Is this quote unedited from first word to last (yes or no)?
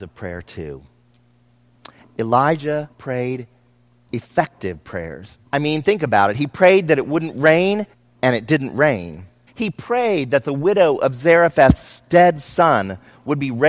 no